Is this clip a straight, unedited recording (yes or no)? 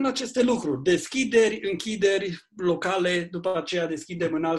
yes